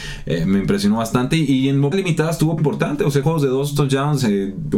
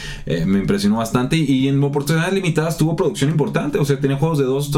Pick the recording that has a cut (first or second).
first